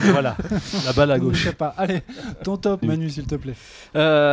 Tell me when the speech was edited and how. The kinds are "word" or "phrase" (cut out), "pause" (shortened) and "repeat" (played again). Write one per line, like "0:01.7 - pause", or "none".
0:02.8 - word